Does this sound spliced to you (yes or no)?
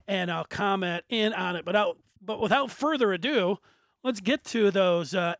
no